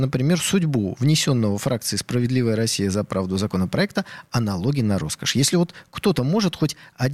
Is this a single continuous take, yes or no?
yes